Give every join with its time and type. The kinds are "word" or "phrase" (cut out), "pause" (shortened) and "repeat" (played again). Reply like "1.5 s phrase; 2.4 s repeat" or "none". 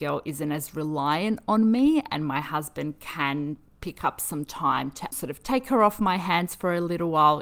5.1 s word